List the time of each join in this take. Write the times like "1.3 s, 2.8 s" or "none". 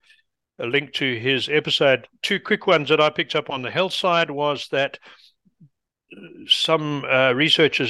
none